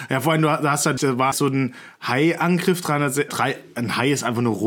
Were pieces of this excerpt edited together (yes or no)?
yes